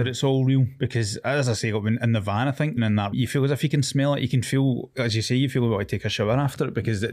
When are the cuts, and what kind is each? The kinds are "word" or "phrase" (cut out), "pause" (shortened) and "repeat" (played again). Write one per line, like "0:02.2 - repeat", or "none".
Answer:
0:02.8 - word
0:03.1 - word